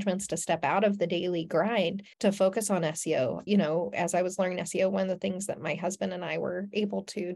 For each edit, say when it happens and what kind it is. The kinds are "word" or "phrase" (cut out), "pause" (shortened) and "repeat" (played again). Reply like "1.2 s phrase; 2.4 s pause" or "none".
2.1 s pause